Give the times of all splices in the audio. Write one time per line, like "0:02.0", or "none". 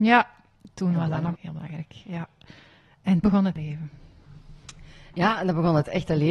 0:01.3
0:03.2
0:03.6